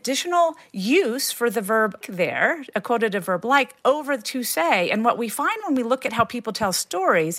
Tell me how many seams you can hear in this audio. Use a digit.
1